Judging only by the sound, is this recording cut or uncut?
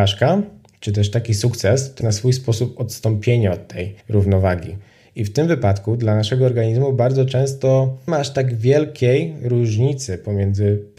cut